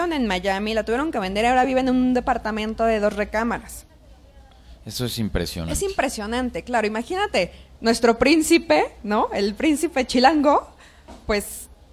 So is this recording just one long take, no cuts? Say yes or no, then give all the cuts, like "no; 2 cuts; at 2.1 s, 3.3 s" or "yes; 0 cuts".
yes; 0 cuts